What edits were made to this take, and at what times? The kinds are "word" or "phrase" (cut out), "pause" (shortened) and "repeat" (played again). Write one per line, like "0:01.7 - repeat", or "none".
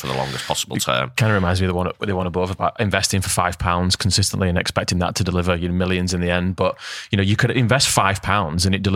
none